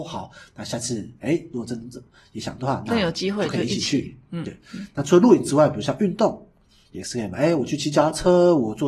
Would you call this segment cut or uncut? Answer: uncut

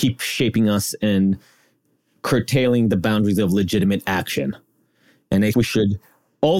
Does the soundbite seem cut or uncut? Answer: cut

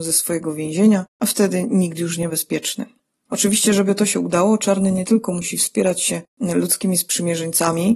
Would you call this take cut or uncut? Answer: cut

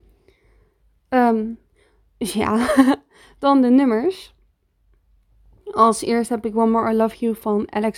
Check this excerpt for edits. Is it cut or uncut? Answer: uncut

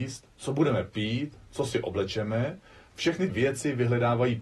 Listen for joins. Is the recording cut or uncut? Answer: cut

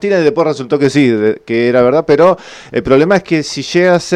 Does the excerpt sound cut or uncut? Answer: uncut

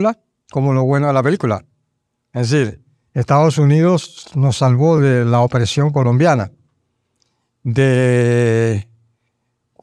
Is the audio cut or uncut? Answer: uncut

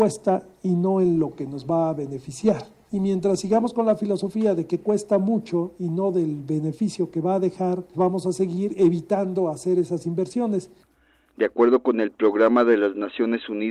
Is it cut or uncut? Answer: cut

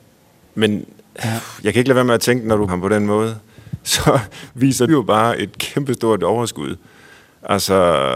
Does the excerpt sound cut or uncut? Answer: cut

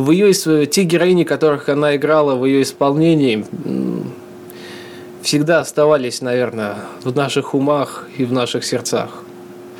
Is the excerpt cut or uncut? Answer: uncut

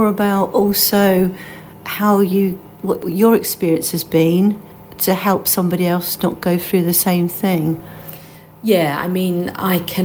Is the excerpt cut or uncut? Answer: uncut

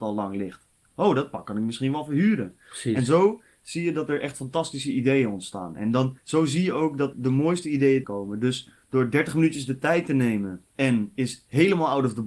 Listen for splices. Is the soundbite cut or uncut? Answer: cut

